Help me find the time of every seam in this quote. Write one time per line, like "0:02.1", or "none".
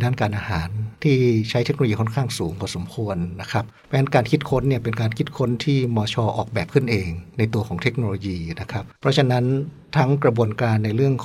0:01.0
0:03.8
0:08.9